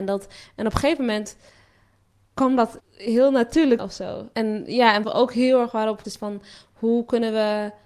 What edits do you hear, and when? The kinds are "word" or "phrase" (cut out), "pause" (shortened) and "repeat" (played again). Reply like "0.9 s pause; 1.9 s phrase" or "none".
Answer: 2.8 s word; 3.8 s word; 5.0 s word; 6.0 s word